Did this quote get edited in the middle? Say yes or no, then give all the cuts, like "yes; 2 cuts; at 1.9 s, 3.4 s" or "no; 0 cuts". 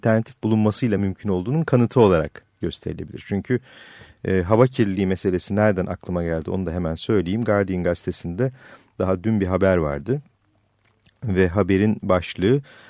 no; 0 cuts